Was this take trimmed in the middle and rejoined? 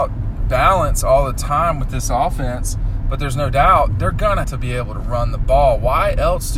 yes; 2 cuts; at 3.9 s, 4.4 s

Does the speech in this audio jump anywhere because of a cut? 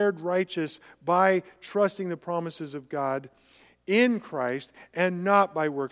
no; 0 cuts

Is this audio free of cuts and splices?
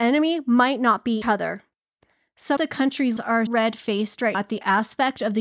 no; 5 cuts; at 1.2 s, 2.6 s, 3.2 s, 3.5 s, 4.3 s

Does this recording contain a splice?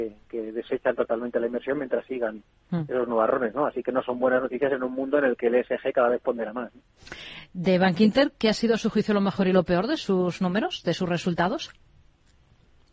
no; 0 cuts

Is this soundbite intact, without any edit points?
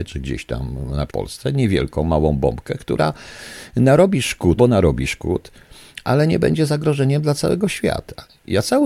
no; 2 cuts; at 1.1 s, 4.6 s

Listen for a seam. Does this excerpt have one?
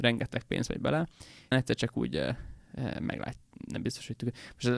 yes; 2 cuts; at 1.5 s, 3.7 s

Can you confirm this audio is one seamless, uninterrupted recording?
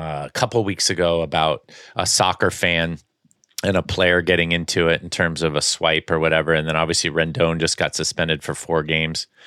yes; 0 cuts

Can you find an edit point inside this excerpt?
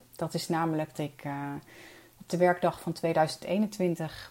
yes; 2 cuts; at 0.9 s, 2.3 s

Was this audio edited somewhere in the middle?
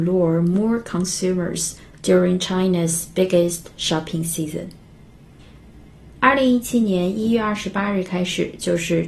no; 0 cuts

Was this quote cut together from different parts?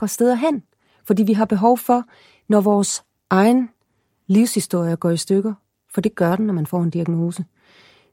no; 0 cuts

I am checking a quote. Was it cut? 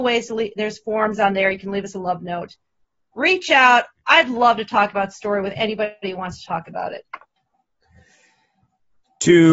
no; 0 cuts

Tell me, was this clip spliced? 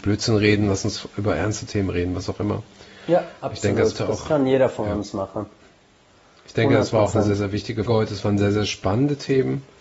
yes; 2 cuts; at 3.9 s, 7.9 s

